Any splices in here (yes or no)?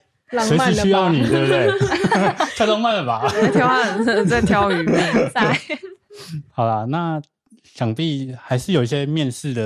no